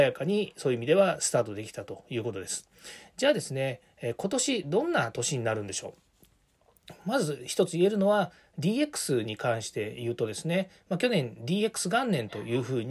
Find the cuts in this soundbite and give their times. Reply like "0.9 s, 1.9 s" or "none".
none